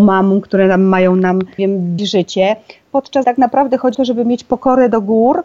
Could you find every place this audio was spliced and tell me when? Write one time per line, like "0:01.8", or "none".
0:01.6
0:02.0
0:03.2
0:03.9